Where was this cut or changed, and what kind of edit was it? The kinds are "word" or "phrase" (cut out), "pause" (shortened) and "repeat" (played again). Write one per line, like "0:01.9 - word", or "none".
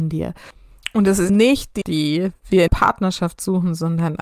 0:01.3 - word
0:01.8 - word
0:02.7 - word